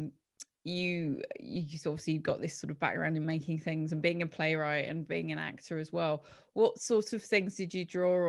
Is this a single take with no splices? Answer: yes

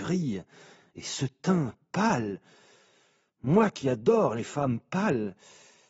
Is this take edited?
no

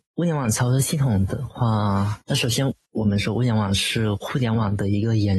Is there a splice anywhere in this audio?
yes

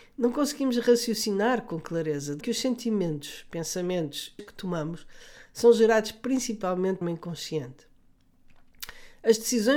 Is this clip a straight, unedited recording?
no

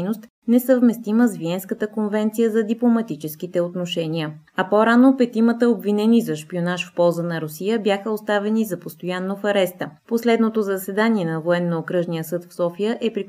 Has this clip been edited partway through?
yes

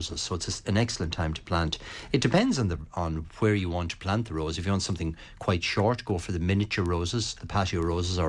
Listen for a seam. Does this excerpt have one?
no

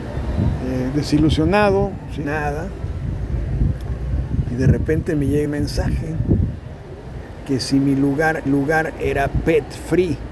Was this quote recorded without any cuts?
no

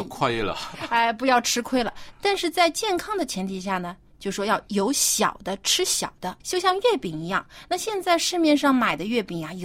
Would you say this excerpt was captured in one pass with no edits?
no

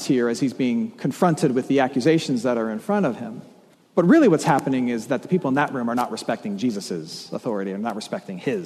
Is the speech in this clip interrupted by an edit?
yes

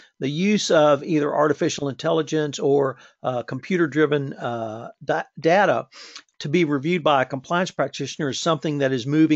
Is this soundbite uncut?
no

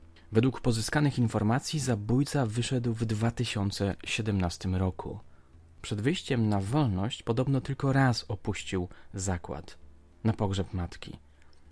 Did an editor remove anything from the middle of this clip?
no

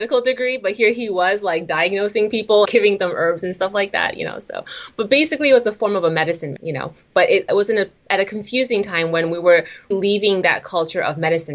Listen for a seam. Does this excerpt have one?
yes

